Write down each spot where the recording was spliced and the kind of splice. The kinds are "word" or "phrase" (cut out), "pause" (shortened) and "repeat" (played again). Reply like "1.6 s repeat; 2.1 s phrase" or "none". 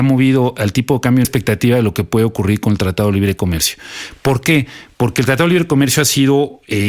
1.2 s phrase